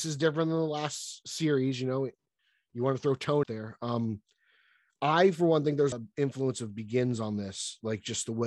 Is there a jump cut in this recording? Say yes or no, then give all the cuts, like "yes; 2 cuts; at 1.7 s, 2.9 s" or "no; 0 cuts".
yes; 2 cuts; at 3.4 s, 5.9 s